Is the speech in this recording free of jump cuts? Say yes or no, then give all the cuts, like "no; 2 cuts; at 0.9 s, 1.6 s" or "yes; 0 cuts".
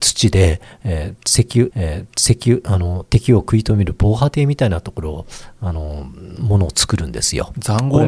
no; 1 cut; at 1.7 s